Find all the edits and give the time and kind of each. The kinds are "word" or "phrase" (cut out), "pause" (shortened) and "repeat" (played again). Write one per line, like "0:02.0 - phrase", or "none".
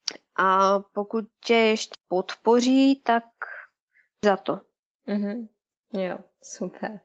0:01.9 - word
0:04.2 - word